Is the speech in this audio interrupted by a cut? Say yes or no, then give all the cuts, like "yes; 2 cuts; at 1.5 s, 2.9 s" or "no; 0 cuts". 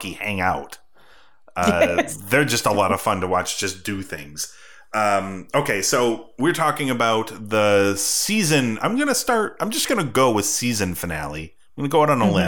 no; 0 cuts